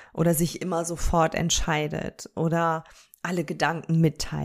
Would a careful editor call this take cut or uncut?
uncut